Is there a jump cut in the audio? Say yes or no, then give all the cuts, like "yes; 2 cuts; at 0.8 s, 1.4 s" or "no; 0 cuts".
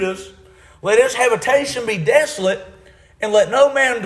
no; 0 cuts